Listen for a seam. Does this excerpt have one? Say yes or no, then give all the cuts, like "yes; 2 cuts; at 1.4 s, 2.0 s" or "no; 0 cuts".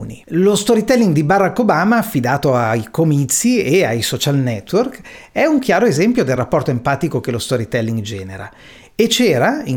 no; 0 cuts